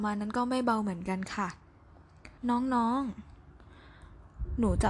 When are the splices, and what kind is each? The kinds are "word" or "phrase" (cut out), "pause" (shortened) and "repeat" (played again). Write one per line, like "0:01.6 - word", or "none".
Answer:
0:02.4 - pause